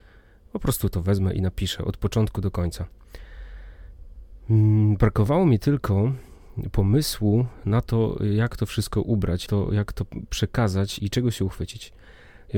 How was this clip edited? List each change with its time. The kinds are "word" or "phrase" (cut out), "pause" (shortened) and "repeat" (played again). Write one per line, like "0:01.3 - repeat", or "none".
0:09.5 - word
0:11.0 - word